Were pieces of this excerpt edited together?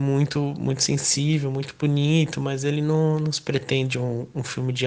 no; 0 cuts

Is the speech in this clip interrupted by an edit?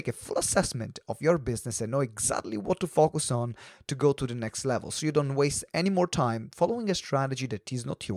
no; 0 cuts

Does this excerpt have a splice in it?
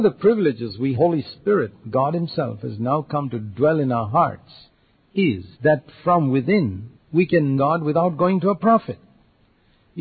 yes; 4 cuts; at 0.9 s, 5.5 s, 6.9 s, 7.6 s

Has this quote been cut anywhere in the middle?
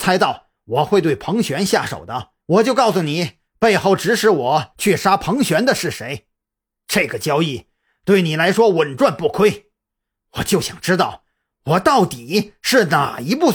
yes; 1 cut; at 2.4 s

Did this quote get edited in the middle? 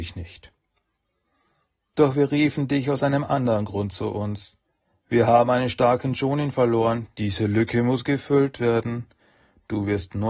no; 0 cuts

